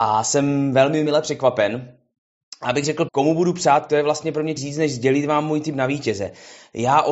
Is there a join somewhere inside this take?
yes; 4 cuts; at 1.1 s, 3.1 s, 3.9 s, 4.6 s

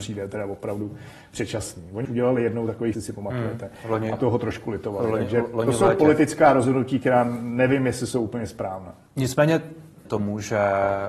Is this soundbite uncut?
no; 4 cuts; at 2.0 s, 2.9 s, 4.2 s, 10.1 s

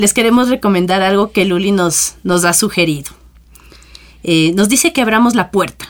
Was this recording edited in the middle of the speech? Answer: no; 0 cuts

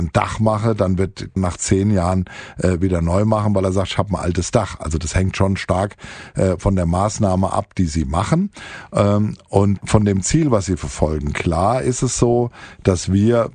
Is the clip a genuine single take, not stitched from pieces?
no; 2 cuts; at 1.4 s, 9.8 s

